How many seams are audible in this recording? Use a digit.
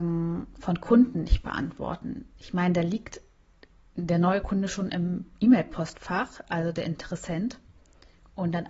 0